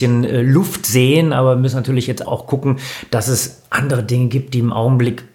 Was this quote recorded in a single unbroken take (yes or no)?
no